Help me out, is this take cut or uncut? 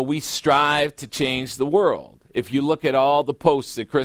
uncut